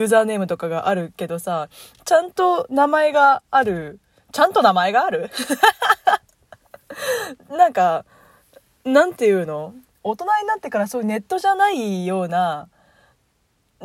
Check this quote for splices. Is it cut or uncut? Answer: uncut